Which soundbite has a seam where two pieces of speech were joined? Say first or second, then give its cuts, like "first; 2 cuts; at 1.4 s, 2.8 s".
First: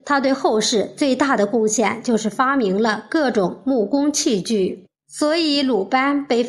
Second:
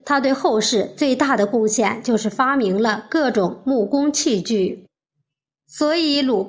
first; 1 cut; at 4.9 s